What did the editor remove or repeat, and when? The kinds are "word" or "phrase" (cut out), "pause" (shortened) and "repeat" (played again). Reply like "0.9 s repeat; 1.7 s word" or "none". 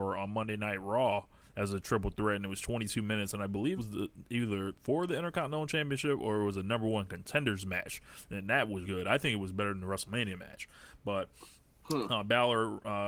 3.8 s word; 8.8 s word